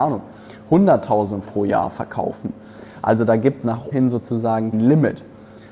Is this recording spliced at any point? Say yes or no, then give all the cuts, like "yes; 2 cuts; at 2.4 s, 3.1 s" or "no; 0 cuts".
yes; 4 cuts; at 1.4 s, 3.6 s, 3.9 s, 4.7 s